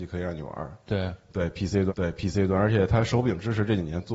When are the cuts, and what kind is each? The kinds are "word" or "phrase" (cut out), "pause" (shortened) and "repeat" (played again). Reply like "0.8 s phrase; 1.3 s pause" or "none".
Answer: 1.9 s repeat